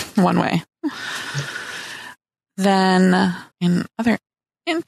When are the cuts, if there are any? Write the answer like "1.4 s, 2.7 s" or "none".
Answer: 3.5 s